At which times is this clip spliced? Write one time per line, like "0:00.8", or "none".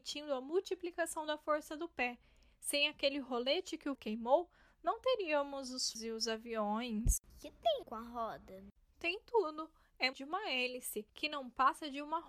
0:03.9
0:05.9
0:07.3
0:07.8
0:10.1
0:11.1